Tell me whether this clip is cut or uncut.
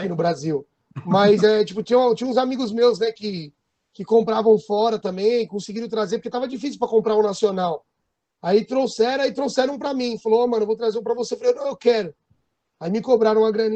uncut